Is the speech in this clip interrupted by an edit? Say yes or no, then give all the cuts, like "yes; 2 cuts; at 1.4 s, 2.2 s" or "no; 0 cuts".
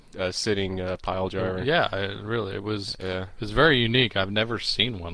no; 0 cuts